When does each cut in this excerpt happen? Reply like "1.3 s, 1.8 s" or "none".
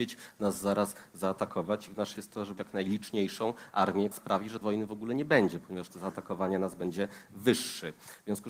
2.2 s, 2.6 s, 4.1 s, 4.6 s, 5.9 s